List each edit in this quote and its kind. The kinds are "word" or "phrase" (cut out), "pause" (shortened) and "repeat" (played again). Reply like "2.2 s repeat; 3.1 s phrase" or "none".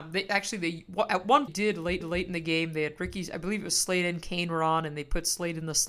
1.5 s phrase; 2.0 s repeat